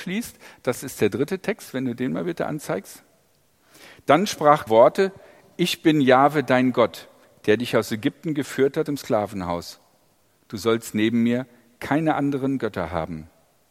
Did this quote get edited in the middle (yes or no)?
yes